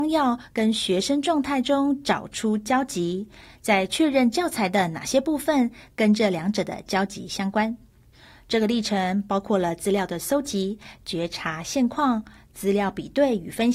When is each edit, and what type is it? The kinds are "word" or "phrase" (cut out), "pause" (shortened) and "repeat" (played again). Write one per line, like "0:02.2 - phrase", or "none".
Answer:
none